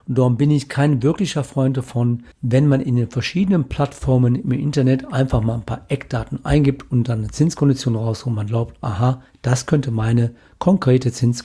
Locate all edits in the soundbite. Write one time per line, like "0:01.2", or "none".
0:02.3